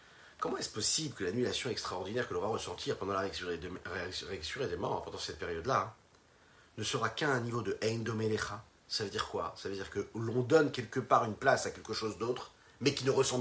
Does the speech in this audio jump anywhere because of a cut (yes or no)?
no